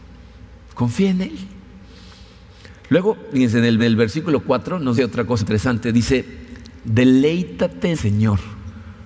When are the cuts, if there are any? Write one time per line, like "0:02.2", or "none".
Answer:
0:02.8
0:03.8
0:05.0
0:05.4
0:07.9